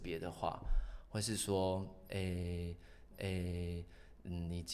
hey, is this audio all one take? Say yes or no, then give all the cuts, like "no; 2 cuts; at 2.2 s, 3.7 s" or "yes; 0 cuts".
no; 1 cut; at 3.1 s